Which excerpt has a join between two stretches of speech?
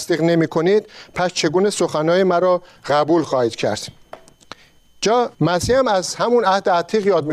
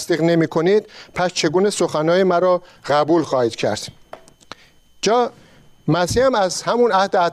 first; 1 cut; at 5.3 s

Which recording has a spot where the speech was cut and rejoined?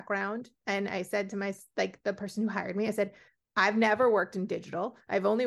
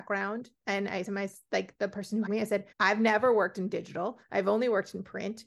second; 3 cuts; at 1.0 s, 2.3 s, 2.7 s

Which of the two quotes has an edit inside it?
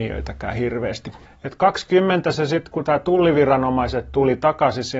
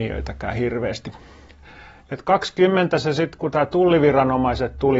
first; 1 cut; at 1.3 s

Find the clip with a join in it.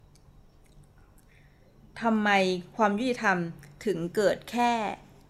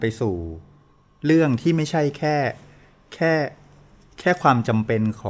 second; 1 cut; at 1.0 s

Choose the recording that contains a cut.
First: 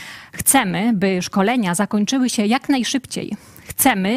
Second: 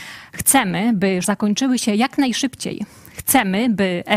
second; 1 cut; at 1.2 s

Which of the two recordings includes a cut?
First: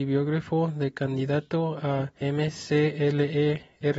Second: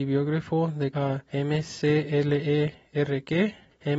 second; 1 cut; at 0.9 s

